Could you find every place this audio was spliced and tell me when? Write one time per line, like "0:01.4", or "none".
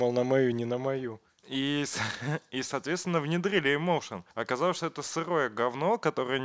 0:04.3